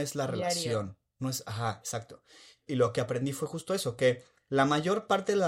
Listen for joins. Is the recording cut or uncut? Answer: uncut